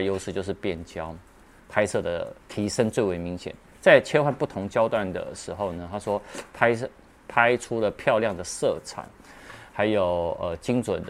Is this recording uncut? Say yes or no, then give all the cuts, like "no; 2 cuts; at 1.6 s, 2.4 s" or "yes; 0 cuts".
no; 1 cut; at 2.4 s